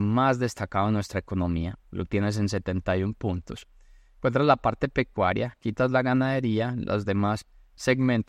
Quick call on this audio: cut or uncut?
uncut